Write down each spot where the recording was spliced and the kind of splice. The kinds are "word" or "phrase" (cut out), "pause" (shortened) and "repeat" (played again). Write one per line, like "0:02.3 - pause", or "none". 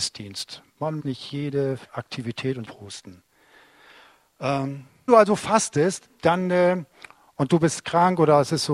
0:01.0 - word
0:01.9 - pause
0:02.6 - phrase
0:05.1 - phrase